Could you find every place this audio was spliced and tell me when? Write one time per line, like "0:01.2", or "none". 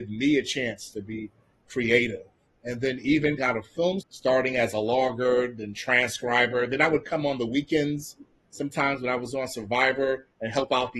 0:03.4
0:04.0